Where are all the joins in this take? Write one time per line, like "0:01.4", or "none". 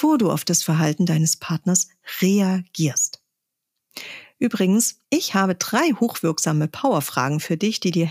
0:05.0

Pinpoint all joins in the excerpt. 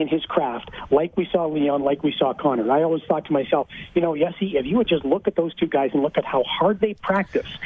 none

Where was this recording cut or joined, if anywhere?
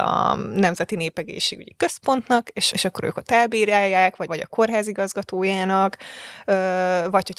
0:02.7
0:04.3

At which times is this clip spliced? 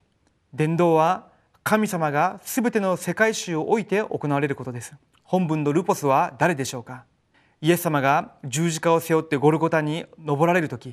0:05.1
0:07.3

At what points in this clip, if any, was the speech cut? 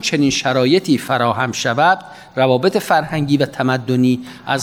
none

